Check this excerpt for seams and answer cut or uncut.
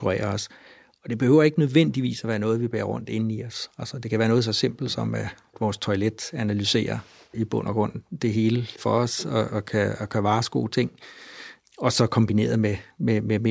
uncut